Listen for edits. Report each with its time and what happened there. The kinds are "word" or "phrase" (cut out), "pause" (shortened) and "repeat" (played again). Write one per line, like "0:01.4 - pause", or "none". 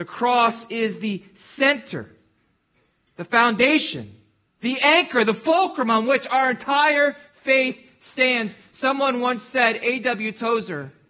0:04.5 - pause